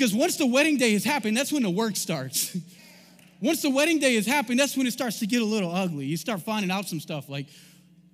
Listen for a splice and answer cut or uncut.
cut